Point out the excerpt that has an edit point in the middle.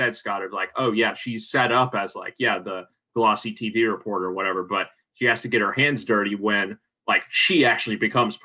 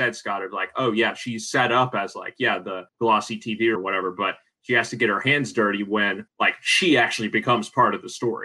second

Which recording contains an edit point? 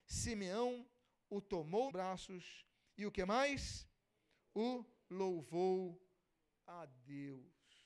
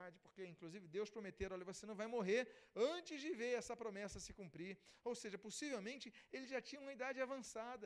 first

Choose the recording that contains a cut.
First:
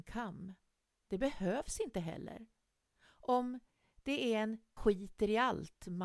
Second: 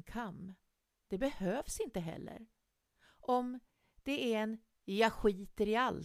first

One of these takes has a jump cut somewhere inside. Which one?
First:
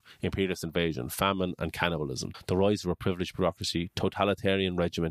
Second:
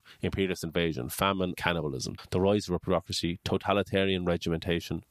second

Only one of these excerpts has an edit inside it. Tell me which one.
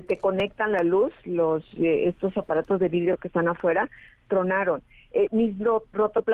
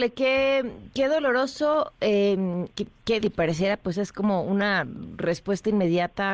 second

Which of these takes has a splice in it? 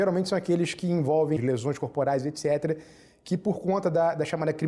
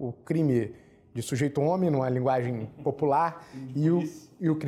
first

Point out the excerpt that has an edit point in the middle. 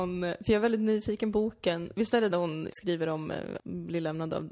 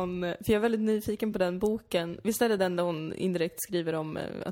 first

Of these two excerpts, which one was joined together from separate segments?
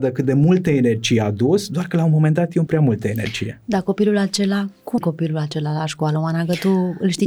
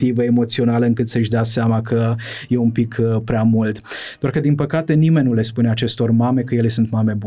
first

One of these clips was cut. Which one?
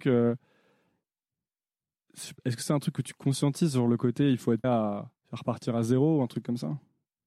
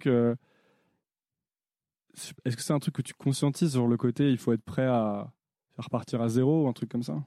first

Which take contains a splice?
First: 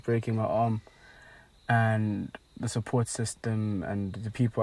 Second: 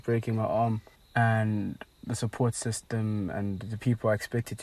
second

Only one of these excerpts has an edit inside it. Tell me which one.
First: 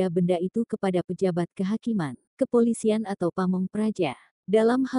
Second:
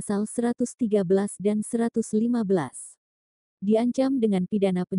first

